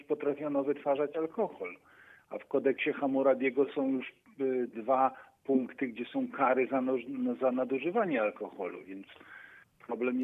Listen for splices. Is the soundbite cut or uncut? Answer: uncut